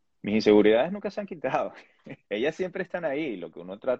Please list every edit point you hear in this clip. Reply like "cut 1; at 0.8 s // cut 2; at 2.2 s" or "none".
cut 1; at 2.2 s